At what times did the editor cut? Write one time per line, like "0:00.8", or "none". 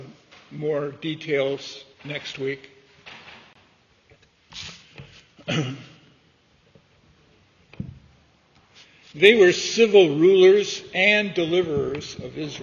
0:01.9